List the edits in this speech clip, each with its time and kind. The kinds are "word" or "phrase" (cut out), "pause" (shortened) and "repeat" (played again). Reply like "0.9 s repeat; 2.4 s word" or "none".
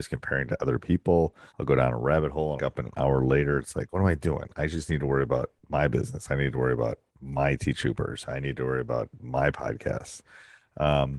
1.5 s pause; 2.6 s phrase; 3.9 s word; 5.6 s pause